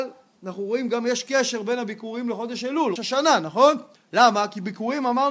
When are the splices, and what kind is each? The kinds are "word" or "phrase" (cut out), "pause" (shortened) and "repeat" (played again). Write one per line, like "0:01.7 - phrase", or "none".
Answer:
0:03.0 - word
0:04.0 - pause